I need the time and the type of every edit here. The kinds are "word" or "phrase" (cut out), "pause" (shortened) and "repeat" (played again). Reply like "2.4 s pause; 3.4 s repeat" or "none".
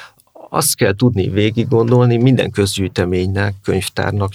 none